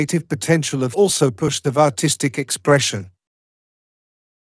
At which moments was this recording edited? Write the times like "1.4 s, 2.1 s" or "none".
0.9 s, 1.6 s

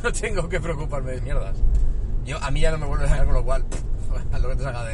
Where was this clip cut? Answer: 1.2 s, 3.2 s

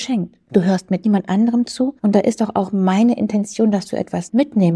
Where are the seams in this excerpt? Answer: 1.0 s, 2.0 s

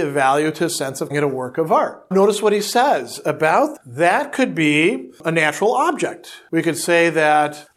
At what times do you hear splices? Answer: 1.1 s, 2.1 s, 3.8 s

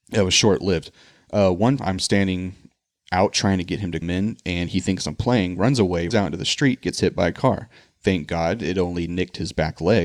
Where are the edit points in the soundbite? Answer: 1.8 s, 4.0 s, 6.1 s

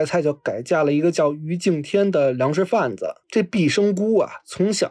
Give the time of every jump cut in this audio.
3.2 s

